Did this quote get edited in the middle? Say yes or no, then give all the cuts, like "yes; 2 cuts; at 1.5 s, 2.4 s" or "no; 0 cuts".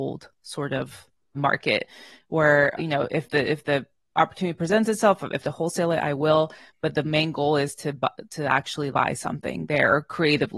yes; 4 cuts; at 1.3 s, 2.8 s, 5.4 s, 8.9 s